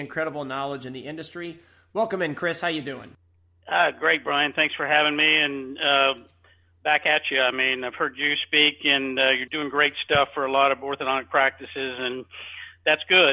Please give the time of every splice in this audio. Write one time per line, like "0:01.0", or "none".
0:09.5

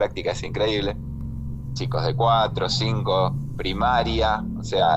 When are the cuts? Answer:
none

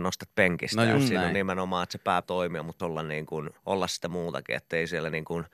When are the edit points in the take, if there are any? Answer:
0:02.2
0:02.8
0:03.6

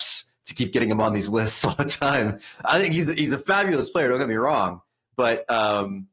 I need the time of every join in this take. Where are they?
none

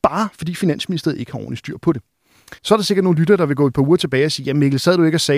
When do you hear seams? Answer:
0:02.6

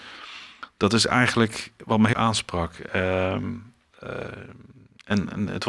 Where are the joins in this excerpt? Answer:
0:02.1

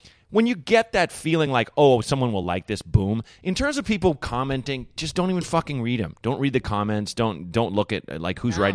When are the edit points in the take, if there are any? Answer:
none

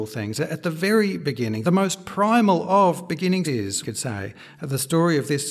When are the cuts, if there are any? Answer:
0:01.6
0:03.4
0:03.8

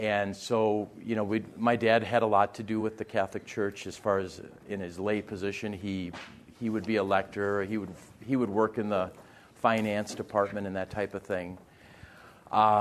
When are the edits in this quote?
none

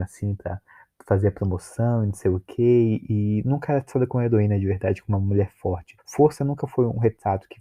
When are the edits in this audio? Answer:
0:06.0

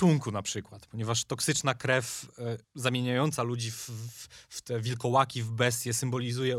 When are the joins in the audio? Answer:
0:02.6

